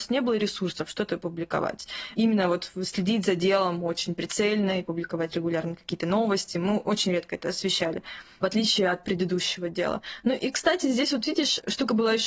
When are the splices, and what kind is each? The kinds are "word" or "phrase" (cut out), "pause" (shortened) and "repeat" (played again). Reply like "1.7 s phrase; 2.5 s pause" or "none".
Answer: none